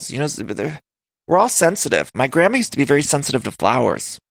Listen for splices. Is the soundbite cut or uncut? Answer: uncut